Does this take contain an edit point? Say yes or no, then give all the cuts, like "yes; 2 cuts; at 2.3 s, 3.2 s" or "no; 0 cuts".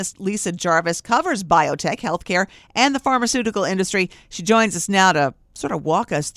no; 0 cuts